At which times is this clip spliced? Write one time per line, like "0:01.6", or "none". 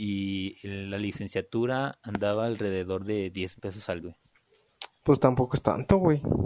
0:03.6
0:04.0